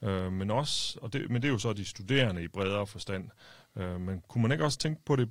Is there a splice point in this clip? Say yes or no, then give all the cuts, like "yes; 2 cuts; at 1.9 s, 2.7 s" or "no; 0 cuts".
no; 0 cuts